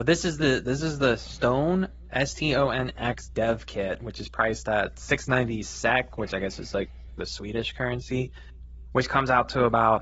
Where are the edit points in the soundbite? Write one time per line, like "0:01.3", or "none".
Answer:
none

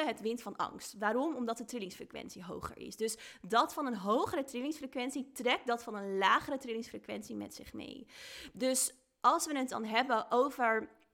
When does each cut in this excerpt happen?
none

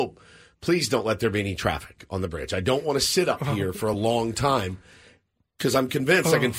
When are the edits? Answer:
none

